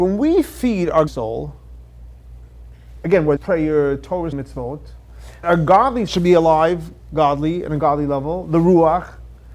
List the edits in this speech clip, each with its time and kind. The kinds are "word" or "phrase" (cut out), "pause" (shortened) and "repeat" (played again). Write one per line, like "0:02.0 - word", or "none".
0:01.1 - word
0:03.4 - word
0:04.3 - word
0:05.4 - phrase
0:06.1 - phrase